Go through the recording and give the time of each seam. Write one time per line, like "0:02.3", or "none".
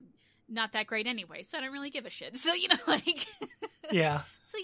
none